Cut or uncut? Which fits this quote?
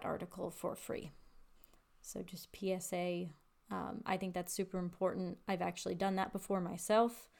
uncut